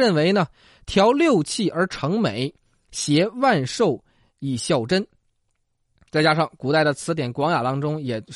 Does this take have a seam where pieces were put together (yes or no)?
no